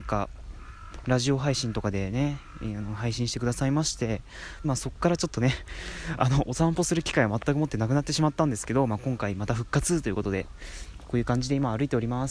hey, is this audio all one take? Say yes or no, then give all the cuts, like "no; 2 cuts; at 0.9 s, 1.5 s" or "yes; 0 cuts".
no; 1 cut; at 4.6 s